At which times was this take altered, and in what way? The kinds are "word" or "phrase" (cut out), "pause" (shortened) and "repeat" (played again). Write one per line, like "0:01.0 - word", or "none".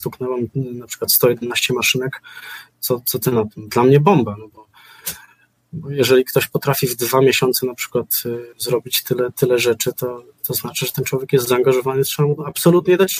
0:08.5 - pause

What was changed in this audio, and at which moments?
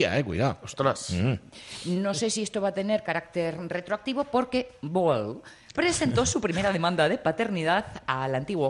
none

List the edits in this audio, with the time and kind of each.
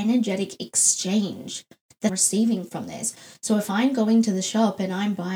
0:02.1 - word

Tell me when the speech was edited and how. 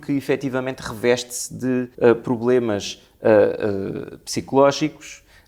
0:01.9 - pause

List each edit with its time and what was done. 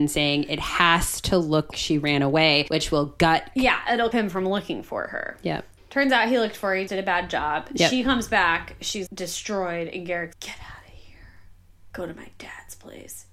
0:01.7 - word
0:03.5 - word
0:04.1 - word
0:06.9 - word
0:09.1 - word
0:10.3 - word

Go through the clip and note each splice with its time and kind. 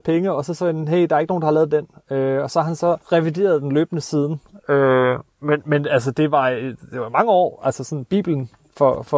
0:03.0 - pause

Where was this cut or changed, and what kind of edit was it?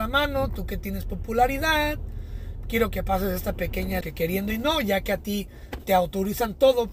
0:04.0 - phrase

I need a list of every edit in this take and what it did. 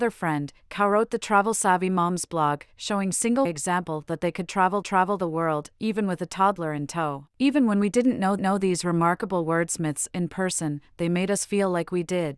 0:03.5 - phrase
0:04.8 - repeat
0:07.3 - pause
0:08.4 - repeat

